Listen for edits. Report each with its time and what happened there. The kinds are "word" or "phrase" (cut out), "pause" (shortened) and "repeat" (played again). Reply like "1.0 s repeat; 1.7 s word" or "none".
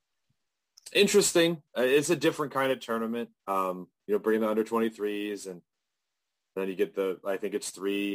1.7 s pause; 3.4 s pause